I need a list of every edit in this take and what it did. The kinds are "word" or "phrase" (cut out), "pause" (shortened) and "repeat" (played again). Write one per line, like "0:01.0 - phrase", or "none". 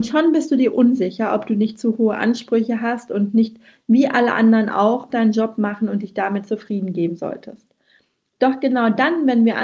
0:05.1 - word